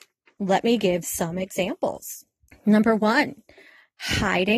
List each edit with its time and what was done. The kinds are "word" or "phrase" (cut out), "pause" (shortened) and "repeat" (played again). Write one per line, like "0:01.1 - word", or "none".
0:01.0 - word
0:02.5 - pause